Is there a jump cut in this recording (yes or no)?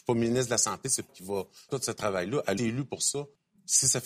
yes